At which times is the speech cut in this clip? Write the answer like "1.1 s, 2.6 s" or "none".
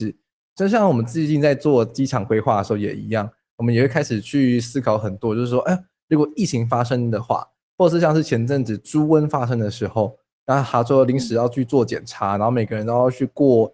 none